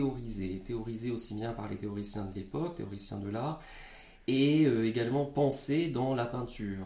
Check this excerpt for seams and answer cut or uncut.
uncut